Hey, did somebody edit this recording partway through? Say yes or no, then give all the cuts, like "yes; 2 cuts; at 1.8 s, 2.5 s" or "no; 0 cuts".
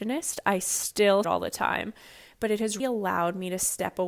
yes; 2 cuts; at 1.2 s, 2.8 s